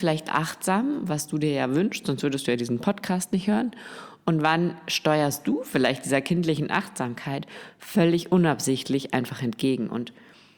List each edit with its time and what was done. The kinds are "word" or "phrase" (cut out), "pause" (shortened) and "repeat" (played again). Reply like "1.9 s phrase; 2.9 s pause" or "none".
none